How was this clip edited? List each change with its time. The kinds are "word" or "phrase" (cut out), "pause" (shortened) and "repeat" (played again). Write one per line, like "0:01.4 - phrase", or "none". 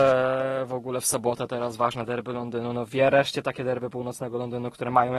none